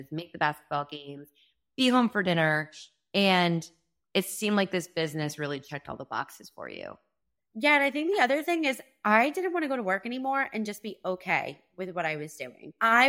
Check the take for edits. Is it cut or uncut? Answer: cut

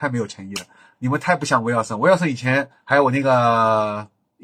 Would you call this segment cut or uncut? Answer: cut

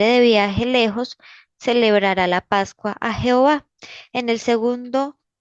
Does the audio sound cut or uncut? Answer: uncut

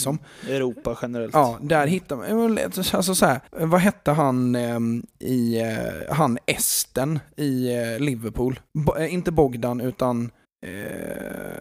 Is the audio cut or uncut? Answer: cut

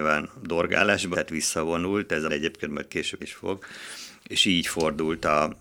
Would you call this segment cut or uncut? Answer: cut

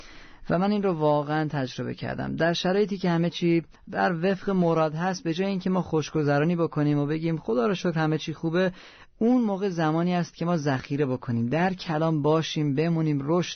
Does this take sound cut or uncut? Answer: cut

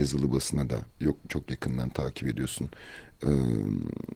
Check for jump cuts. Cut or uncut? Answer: cut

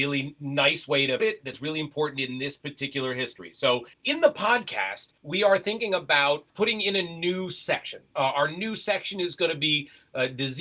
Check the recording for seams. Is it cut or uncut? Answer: cut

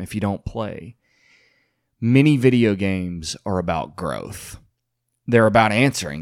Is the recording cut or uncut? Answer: uncut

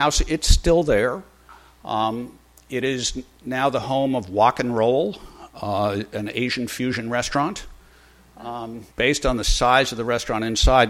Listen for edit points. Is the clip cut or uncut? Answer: cut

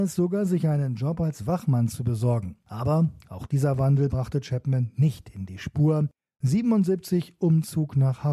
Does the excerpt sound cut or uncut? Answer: uncut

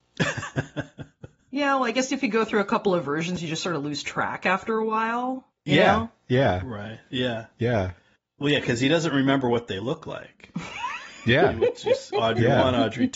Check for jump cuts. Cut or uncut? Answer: uncut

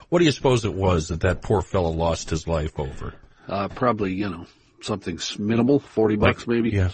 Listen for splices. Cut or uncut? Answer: uncut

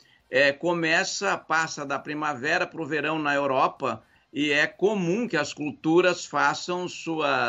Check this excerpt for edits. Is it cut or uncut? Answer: uncut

